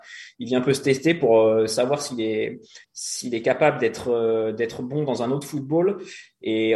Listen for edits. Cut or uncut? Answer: cut